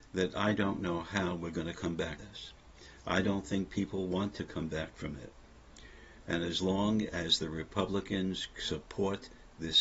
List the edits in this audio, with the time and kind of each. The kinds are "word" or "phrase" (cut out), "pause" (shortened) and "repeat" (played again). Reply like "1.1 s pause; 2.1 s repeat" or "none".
2.2 s word

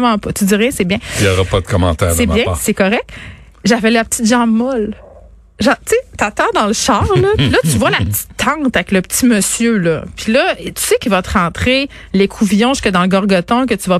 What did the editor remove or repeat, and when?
none

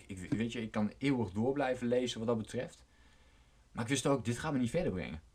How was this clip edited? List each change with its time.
none

